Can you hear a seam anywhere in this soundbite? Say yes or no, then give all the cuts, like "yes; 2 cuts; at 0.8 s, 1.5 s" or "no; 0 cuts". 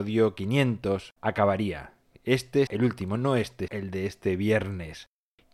yes; 3 cuts; at 1.2 s, 2.7 s, 3.7 s